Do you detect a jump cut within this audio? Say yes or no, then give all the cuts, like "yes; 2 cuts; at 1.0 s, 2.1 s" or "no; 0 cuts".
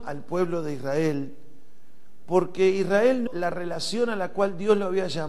yes; 1 cut; at 3.3 s